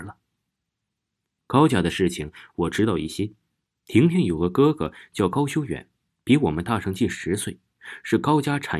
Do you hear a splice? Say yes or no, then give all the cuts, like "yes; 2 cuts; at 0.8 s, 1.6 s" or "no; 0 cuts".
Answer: no; 0 cuts